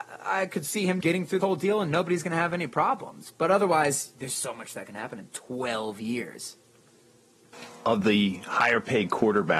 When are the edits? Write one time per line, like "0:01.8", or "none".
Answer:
0:01.0
0:01.4
0:04.4